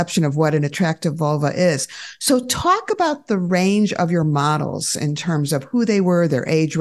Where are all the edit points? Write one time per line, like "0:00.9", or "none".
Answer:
none